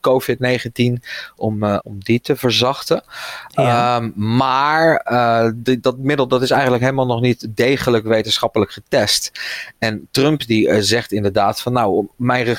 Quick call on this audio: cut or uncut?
cut